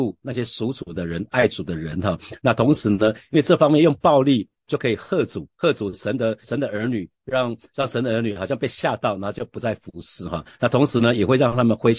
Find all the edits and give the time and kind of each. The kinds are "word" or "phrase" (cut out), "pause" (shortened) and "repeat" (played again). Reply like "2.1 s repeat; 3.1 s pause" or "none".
5.5 s pause; 6.4 s phrase